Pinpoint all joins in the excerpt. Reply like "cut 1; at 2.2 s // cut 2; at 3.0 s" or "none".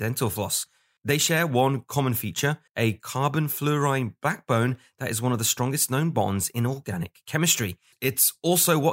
cut 1; at 2.7 s